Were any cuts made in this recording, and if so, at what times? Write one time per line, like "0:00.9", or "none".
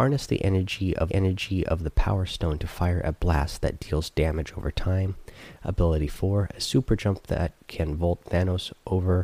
0:01.1